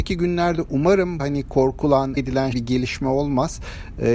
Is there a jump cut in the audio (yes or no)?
yes